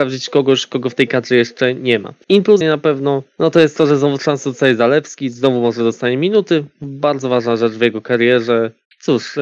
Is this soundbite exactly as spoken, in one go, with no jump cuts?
no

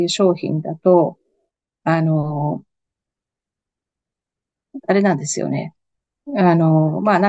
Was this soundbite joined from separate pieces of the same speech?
yes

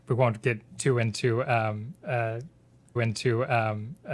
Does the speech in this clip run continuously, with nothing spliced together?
no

